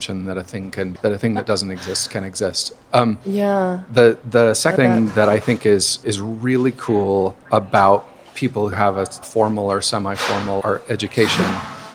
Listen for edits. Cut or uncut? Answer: cut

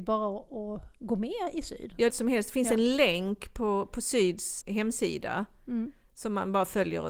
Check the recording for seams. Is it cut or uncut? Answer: cut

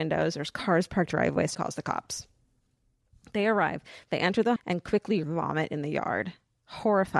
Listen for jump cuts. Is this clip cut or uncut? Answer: cut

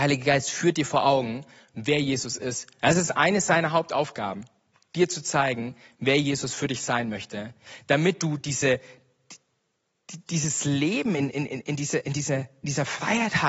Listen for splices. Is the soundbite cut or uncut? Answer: uncut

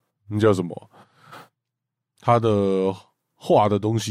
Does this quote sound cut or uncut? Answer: uncut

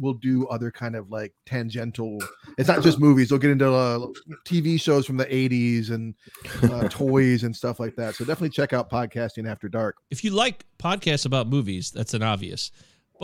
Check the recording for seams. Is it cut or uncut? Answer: cut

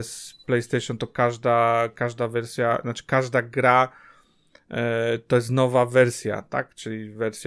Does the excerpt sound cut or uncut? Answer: uncut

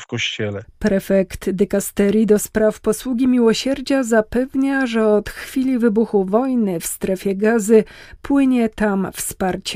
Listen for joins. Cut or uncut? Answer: uncut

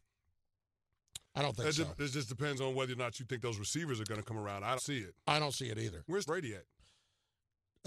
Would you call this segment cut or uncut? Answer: cut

